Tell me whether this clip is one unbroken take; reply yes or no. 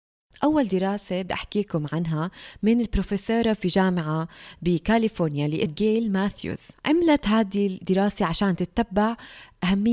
no